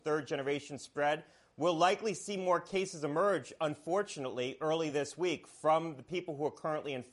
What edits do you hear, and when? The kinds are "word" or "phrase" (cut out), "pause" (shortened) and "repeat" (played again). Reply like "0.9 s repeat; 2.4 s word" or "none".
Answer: none